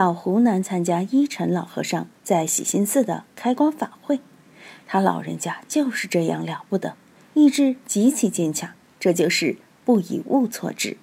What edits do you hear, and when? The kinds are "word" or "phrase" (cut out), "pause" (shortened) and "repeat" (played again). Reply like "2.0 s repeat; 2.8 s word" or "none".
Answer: 8.8 s pause